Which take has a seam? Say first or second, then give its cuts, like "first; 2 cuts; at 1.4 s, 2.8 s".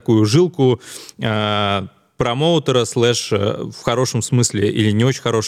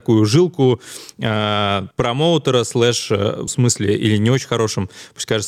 second; 2 cuts; at 1.9 s, 3.5 s